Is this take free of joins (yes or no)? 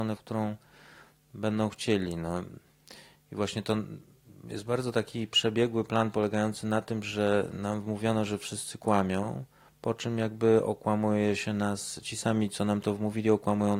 yes